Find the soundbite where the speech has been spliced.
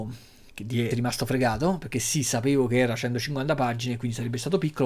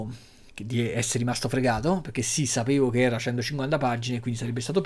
first; 1 cut; at 0.9 s

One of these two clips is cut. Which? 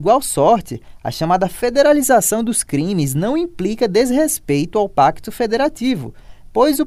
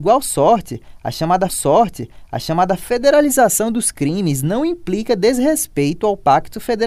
second; 1 cut; at 1.5 s

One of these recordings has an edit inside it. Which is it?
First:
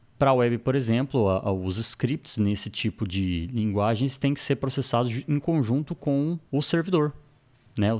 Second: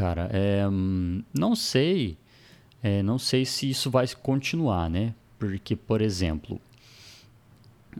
first; 1 cut; at 6.5 s

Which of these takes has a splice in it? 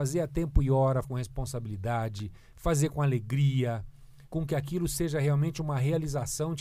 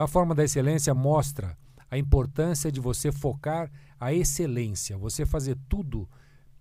first; 2 cuts; at 1.0 s, 4.3 s

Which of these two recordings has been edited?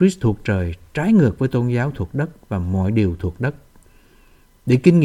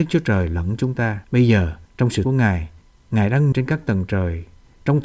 second; 5 cuts; at 1.2 s, 1.8 s, 2.2 s, 2.8 s, 3.5 s

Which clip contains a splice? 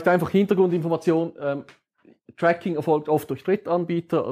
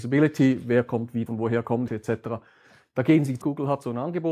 second; 3 cuts; at 1.3 s, 1.9 s, 3.4 s

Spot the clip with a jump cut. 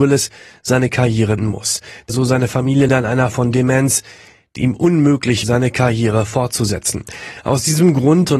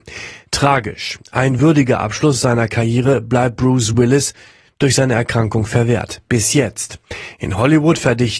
first; 6 cuts; at 1.4 s, 2.1 s, 2.9 s, 3.3 s, 4.6 s, 5.4 s

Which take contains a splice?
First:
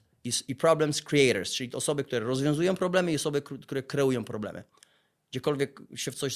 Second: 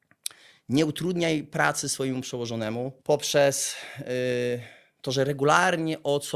second; 1 cut; at 3.0 s

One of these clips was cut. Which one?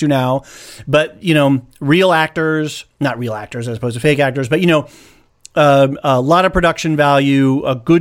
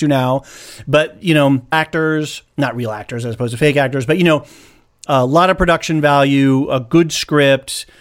second; 2 cuts; at 1.7 s, 5.1 s

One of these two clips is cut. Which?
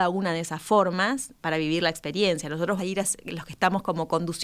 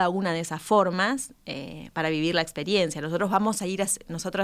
first; 3 cuts; at 1.4 s, 2.8 s, 3.2 s

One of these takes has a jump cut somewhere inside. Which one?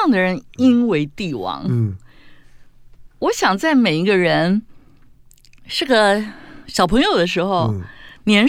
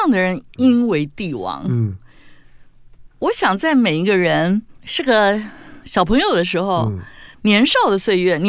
second; 1 cut; at 4.8 s

